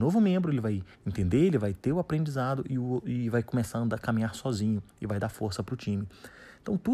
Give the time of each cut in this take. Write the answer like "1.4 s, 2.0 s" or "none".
0.9 s